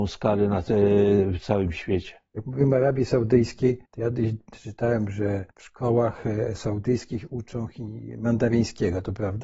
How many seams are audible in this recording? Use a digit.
2